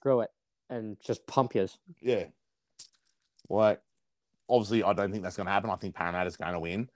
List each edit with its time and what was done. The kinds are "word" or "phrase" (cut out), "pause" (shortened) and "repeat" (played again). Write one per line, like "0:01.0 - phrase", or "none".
0:02.0 - pause